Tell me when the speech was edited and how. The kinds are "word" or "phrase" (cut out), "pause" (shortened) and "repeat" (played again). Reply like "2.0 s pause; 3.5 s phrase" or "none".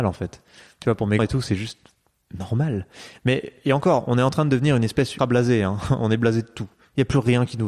1.2 s word; 5.2 s word